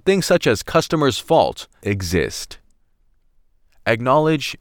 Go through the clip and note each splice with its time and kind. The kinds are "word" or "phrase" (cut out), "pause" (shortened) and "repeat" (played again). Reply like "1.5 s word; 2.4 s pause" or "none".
1.8 s word